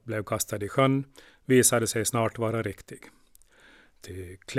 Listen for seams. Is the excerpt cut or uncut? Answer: uncut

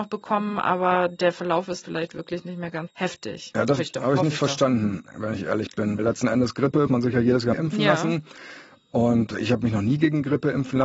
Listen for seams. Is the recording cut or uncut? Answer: cut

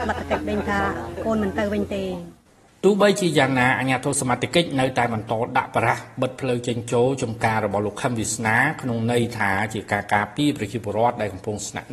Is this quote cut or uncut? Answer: cut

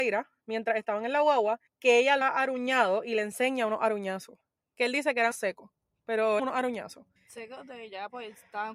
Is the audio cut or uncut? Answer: cut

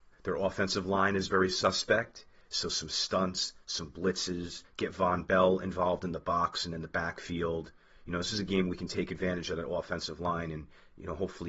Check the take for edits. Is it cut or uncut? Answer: uncut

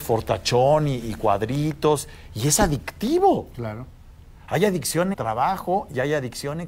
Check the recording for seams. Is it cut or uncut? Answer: cut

